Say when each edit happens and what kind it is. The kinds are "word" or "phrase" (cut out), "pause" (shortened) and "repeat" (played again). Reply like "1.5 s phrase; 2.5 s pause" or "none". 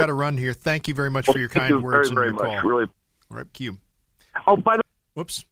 2.9 s word; 3.5 s word